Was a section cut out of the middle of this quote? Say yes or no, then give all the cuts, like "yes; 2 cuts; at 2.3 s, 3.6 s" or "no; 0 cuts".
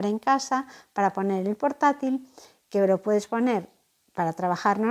no; 0 cuts